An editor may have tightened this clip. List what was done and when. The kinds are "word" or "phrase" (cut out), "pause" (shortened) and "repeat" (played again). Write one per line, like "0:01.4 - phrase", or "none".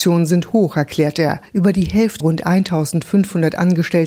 0:01.5 - pause
0:02.2 - word